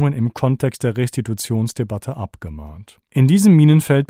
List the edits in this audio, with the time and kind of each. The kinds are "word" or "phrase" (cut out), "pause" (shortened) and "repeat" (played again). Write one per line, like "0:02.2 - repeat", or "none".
0:03.1 - pause